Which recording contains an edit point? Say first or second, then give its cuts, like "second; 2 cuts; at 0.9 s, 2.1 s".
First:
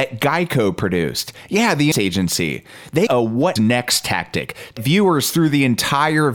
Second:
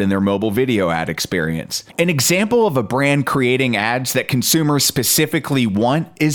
first; 4 cuts; at 1.9 s, 3.1 s, 3.6 s, 4.8 s